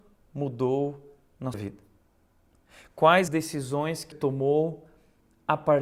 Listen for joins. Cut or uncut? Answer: cut